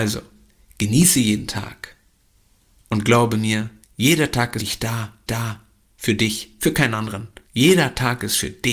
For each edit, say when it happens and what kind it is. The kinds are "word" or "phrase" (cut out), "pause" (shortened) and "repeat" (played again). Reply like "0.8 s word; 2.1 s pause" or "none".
2.3 s pause; 3.8 s pause; 4.6 s word; 5.3 s repeat; 7.4 s pause